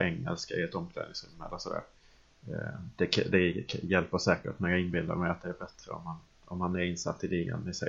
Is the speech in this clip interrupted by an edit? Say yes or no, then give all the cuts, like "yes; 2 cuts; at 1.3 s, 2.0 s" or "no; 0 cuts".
no; 0 cuts